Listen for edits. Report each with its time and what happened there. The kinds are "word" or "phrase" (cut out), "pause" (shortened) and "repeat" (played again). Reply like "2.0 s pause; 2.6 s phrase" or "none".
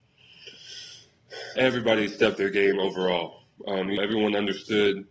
1.6 s word; 2.4 s word; 4.0 s word